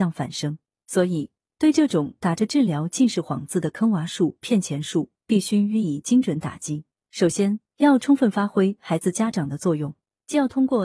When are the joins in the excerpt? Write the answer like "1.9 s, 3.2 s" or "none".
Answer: none